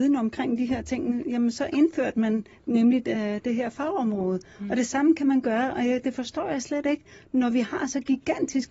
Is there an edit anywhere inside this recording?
no; 0 cuts

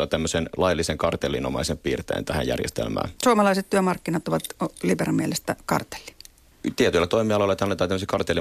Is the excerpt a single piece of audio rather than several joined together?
no; 1 cut; at 3.2 s

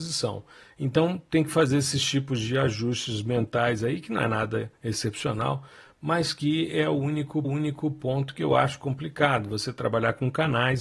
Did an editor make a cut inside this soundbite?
yes; 1 cut; at 7.4 s

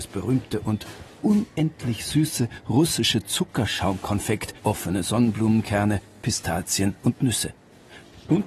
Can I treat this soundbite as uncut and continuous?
no; 1 cut; at 4.6 s

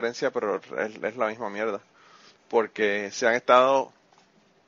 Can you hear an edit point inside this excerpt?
no; 0 cuts

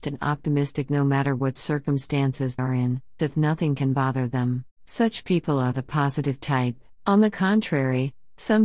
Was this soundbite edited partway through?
yes; 4 cuts; at 2.6 s, 3.2 s, 4.7 s, 7.0 s

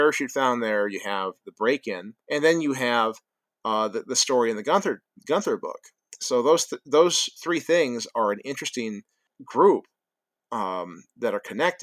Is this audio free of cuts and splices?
no; 1 cut; at 2.2 s

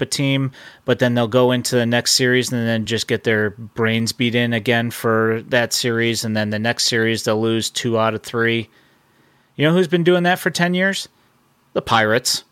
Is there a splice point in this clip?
no; 0 cuts

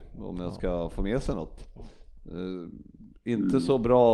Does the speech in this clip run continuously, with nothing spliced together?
yes; 0 cuts

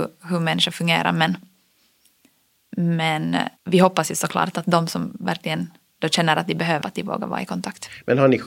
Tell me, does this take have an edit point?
yes; 2 cuts; at 3.6 s, 6.8 s

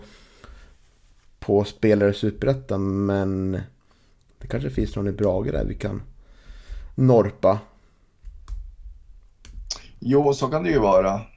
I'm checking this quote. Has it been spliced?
no; 0 cuts

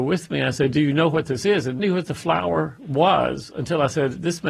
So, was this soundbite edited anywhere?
yes; 1 cut; at 1.8 s

